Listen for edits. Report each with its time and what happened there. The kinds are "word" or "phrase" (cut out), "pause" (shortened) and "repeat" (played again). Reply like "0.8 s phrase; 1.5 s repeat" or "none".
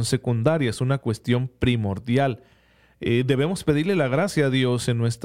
none